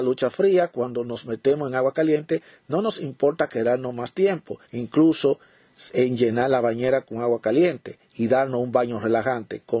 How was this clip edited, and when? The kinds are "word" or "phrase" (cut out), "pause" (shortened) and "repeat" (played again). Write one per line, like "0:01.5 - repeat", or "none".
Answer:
0:04.6 - pause